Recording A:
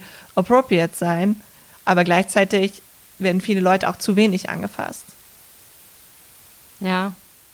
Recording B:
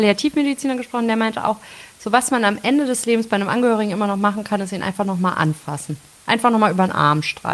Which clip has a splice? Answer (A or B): A